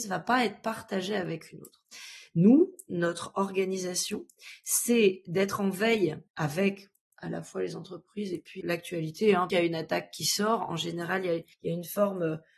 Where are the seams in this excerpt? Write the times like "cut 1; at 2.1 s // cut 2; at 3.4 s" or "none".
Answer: cut 1; at 6.3 s // cut 2; at 8.6 s // cut 3; at 9.5 s // cut 4; at 11.5 s